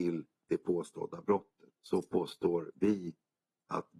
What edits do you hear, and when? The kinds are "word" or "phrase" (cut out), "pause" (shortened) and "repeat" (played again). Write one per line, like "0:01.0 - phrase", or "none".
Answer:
0:01.8 - pause

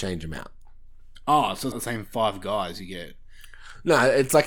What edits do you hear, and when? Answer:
0:01.7 - word

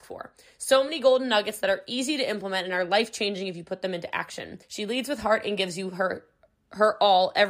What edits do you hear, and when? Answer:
0:04.6 - pause

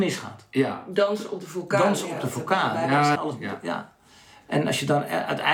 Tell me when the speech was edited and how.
0:03.1 - phrase

